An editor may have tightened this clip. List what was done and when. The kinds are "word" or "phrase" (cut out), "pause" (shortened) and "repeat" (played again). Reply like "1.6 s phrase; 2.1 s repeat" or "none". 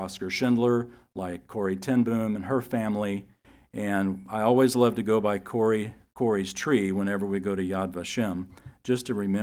none

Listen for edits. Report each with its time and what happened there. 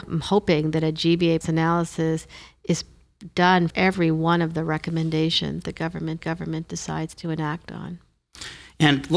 1.4 s word; 3.7 s word; 5.6 s word; 6.2 s repeat

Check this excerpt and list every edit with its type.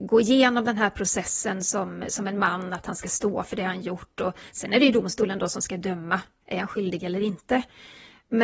none

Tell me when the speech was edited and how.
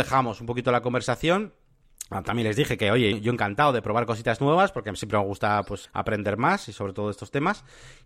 3.1 s word; 5.9 s word

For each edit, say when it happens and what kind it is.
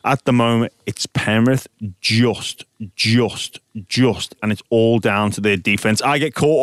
2.9 s repeat

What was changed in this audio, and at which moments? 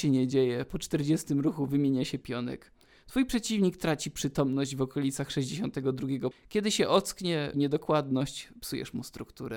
2.2 s word; 6.3 s word; 7.5 s word

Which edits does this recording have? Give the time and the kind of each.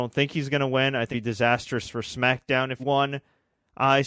1.1 s word; 2.8 s word

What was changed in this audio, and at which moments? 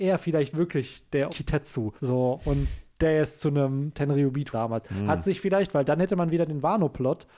1.3 s word; 2.0 s pause; 4.5 s word

